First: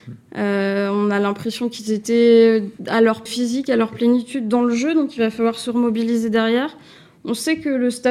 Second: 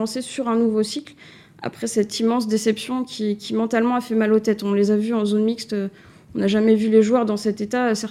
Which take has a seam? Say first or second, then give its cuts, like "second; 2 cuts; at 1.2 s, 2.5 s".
first; 2 cuts; at 2.8 s, 3.3 s